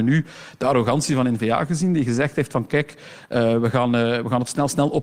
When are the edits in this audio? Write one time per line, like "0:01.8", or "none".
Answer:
none

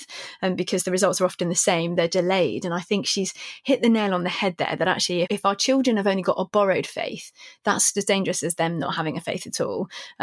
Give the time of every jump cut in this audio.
0:02.1
0:05.2
0:07.9

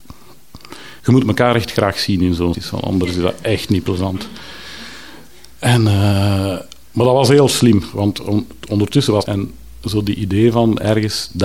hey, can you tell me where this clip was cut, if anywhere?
0:01.0
0:02.5
0:06.8
0:09.3

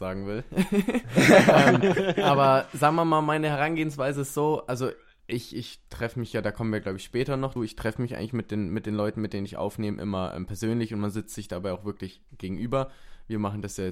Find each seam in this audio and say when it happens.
0:05.2
0:07.6

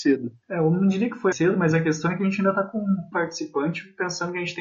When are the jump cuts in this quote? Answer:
0:01.3
0:03.1

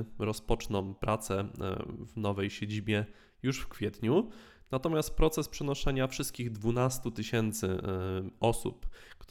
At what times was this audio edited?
none

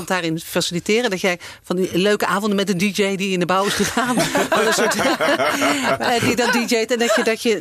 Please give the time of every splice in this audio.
none

